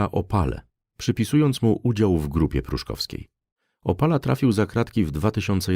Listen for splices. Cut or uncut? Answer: uncut